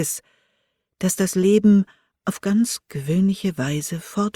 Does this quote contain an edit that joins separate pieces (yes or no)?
no